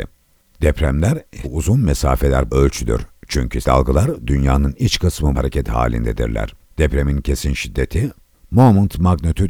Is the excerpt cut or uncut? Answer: cut